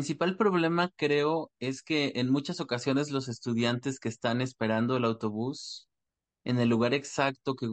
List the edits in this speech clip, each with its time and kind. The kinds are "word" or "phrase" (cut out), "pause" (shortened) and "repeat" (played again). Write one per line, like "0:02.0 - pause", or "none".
none